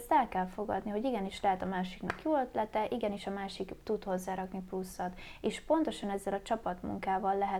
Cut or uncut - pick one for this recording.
uncut